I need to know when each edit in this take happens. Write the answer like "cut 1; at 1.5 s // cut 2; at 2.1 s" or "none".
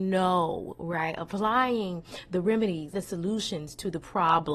cut 1; at 2.9 s